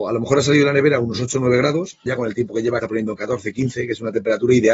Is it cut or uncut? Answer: cut